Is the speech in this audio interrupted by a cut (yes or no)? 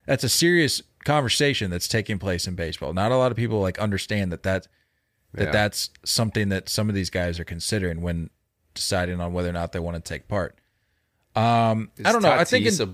no